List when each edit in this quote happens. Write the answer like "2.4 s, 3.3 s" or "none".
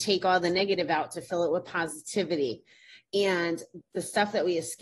3.8 s